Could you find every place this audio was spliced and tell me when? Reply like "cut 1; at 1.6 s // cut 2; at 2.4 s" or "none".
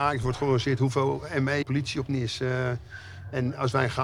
cut 1; at 1.6 s // cut 2; at 2.1 s